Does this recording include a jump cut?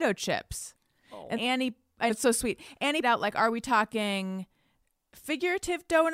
yes; 3 cuts; at 1.3 s, 2.1 s, 3.0 s

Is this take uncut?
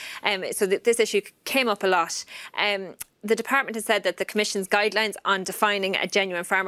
yes; 0 cuts

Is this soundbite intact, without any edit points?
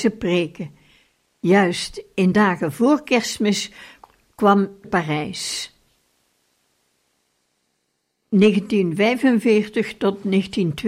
no; 2 cuts; at 2.3 s, 4.8 s

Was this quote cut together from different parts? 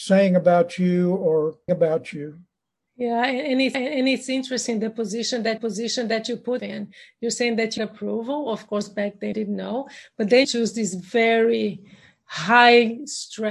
yes; 7 cuts; at 1.7 s, 3.7 s, 5.6 s, 6.6 s, 7.8 s, 9.3 s, 10.4 s

